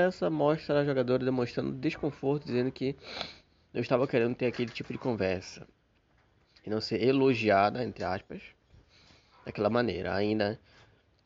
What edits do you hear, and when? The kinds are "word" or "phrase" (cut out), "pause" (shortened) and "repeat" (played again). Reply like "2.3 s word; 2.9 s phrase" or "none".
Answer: none